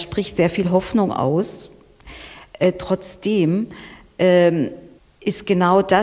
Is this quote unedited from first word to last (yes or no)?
no